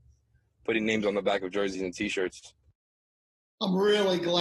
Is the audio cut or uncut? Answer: uncut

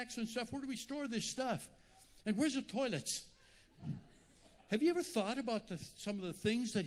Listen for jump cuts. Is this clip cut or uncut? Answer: uncut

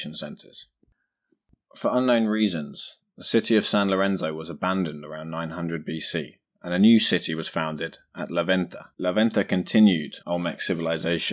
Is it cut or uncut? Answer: cut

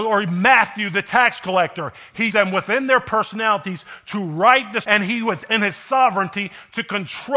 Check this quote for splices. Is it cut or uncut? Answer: cut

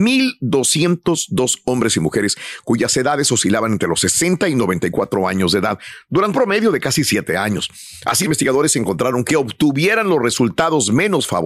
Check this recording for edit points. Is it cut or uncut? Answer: cut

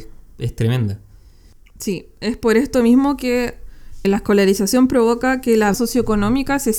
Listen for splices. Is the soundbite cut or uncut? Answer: cut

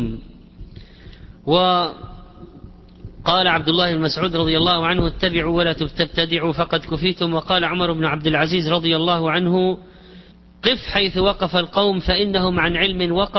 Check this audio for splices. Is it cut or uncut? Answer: cut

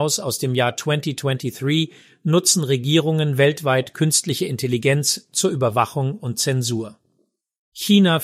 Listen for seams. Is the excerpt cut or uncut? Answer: uncut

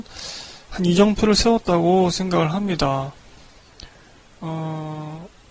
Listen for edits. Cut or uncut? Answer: uncut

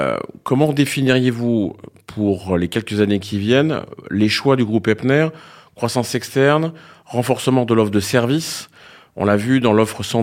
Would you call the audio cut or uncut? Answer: uncut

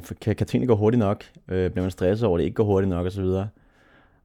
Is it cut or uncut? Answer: uncut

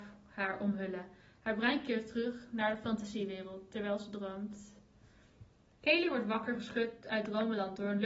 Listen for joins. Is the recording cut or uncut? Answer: uncut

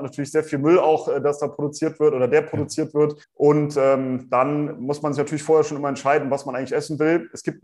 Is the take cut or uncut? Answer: cut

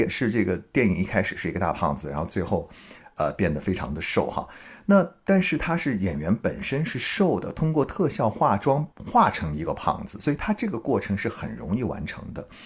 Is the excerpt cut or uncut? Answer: cut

